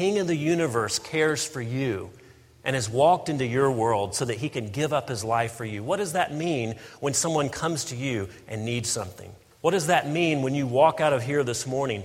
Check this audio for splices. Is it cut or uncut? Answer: uncut